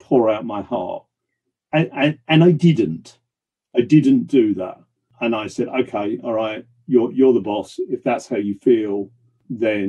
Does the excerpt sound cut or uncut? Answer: uncut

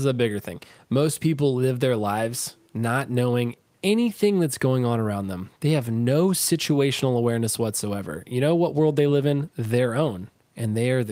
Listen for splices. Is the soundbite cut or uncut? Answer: uncut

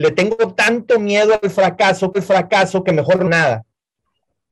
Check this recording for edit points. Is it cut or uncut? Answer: cut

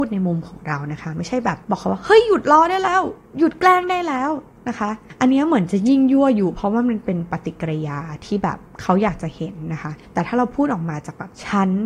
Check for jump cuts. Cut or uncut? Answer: cut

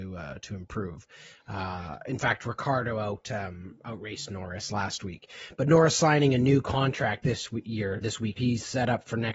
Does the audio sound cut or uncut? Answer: cut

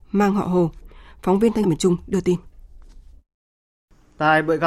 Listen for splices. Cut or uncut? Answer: cut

